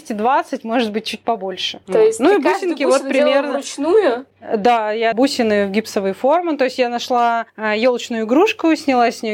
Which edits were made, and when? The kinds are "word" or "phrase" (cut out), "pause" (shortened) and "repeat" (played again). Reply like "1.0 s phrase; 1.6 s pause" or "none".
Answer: 1.8 s pause; 5.1 s word; 7.5 s pause